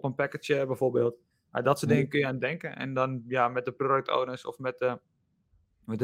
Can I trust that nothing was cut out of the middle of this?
yes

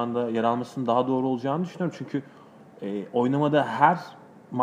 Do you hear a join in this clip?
no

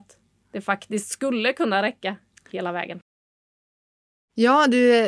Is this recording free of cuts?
yes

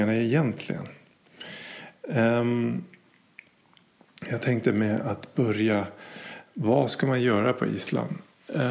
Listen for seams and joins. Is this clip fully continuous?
yes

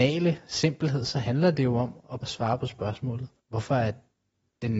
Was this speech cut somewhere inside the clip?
yes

